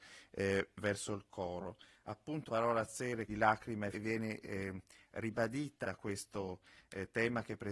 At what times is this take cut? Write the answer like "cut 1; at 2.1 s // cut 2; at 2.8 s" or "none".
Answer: cut 1; at 2.5 s // cut 2; at 3.3 s // cut 3; at 3.9 s // cut 4; at 5.8 s